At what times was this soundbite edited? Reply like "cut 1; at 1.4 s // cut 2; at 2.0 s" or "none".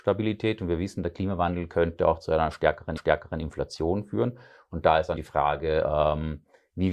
cut 1; at 3.0 s // cut 2; at 5.2 s